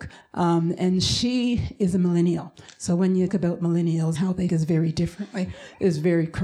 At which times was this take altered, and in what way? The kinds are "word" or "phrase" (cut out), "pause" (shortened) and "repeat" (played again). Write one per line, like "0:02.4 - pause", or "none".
0:03.3 - word
0:04.1 - word
0:04.5 - word